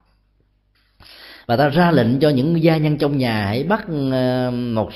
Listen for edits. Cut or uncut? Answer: uncut